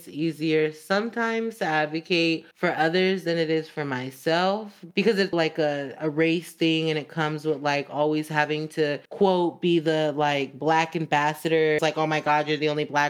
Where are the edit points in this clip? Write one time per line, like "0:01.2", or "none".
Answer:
0:02.5
0:05.3
0:09.1
0:11.8